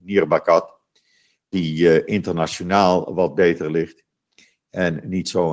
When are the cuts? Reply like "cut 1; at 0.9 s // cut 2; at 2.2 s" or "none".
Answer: cut 1; at 1.5 s